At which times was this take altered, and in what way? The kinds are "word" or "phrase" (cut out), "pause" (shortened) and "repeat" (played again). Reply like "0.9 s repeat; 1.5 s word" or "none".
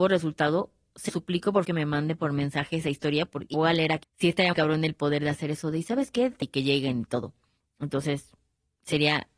1.1 s word; 1.6 s word; 3.5 s word; 4.0 s word; 4.5 s word; 6.4 s word